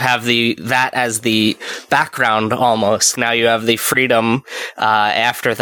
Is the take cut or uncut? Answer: cut